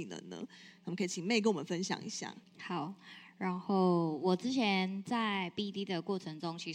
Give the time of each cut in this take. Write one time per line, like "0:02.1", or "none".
0:02.4

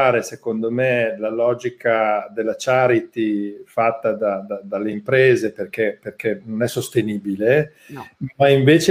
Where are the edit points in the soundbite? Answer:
none

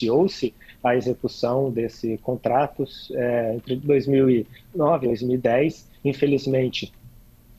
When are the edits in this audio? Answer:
0:05.0

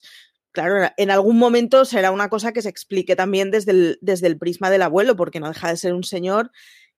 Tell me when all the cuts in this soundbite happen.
none

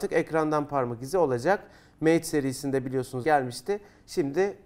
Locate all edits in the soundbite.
0:03.2

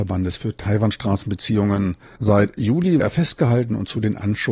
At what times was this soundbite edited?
0:03.0

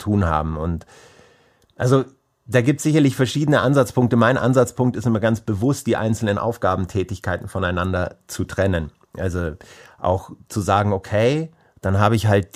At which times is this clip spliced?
none

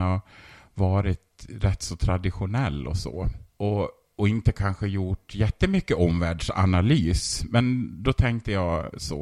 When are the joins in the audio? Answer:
0:03.5

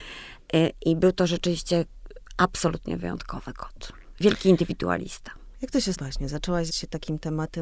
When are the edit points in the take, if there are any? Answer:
0:05.9
0:06.7

